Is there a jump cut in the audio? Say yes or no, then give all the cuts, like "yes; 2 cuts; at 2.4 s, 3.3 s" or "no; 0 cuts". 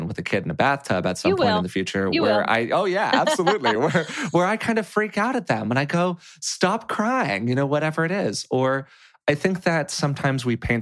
no; 0 cuts